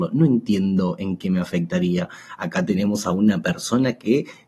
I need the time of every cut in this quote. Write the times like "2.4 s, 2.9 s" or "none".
none